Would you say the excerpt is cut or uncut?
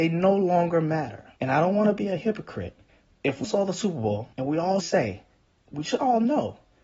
cut